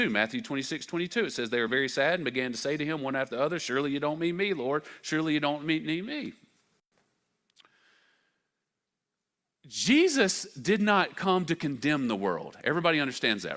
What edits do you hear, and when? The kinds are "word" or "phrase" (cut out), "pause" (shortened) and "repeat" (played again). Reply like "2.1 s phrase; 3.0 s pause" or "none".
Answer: none